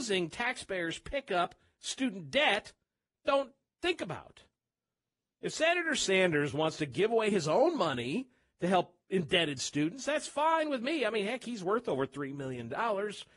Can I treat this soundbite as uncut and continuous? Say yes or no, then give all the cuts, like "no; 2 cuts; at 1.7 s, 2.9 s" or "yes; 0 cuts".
yes; 0 cuts